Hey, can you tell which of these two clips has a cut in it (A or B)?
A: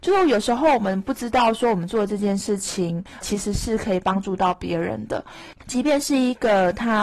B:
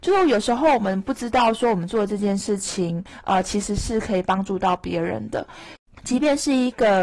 A